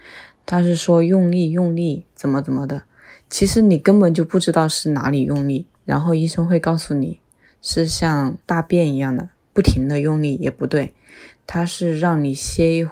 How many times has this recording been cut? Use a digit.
0